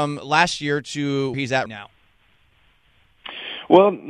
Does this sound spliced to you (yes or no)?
yes